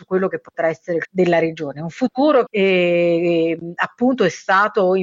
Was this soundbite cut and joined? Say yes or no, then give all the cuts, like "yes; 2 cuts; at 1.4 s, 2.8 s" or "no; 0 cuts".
yes; 2 cuts; at 1.0 s, 2.5 s